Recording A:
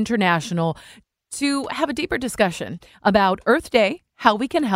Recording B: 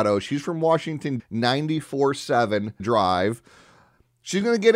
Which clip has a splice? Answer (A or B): B